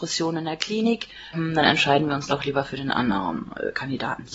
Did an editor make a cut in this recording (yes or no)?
yes